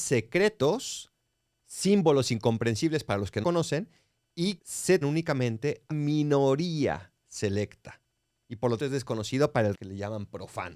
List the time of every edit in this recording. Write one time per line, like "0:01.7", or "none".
0:03.4
0:04.6
0:05.0
0:05.9
0:08.8
0:09.7